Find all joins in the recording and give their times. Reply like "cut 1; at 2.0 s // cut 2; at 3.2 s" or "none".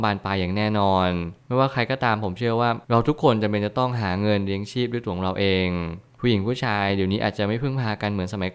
cut 1; at 2.8 s